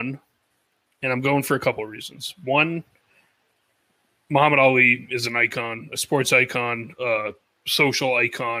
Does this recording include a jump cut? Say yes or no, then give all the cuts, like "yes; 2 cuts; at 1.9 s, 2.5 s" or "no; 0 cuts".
no; 0 cuts